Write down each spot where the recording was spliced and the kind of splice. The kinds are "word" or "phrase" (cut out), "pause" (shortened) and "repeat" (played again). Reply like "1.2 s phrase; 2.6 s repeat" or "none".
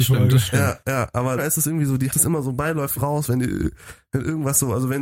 1.4 s word; 2.1 s word; 3.0 s word